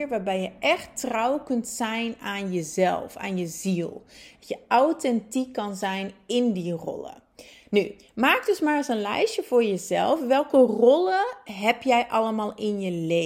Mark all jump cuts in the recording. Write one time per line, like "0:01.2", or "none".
none